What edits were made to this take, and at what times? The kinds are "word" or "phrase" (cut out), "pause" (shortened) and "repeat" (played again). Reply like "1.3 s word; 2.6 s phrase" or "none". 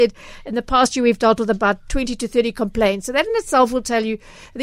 none